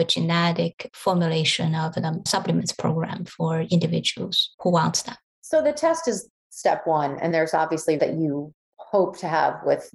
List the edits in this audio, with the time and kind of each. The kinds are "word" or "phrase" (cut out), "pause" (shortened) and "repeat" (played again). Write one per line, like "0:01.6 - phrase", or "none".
0:02.3 - word
0:04.5 - pause
0:05.3 - pause
0:07.3 - word
0:08.0 - word